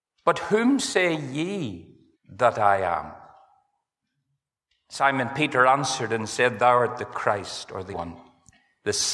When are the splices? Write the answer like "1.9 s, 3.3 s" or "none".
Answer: 2.1 s, 7.9 s